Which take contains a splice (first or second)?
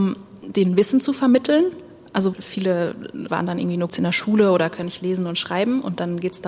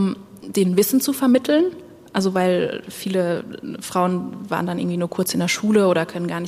first